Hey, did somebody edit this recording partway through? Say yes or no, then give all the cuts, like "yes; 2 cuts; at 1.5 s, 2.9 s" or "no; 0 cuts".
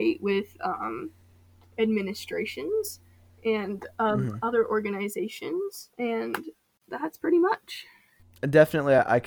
yes; 1 cut; at 5.9 s